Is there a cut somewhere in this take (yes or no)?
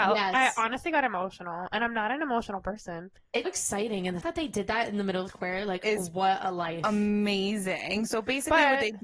yes